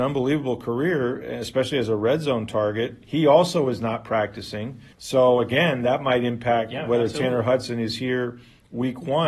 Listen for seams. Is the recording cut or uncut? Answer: cut